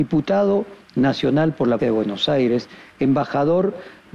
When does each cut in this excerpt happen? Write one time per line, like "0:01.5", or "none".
0:01.8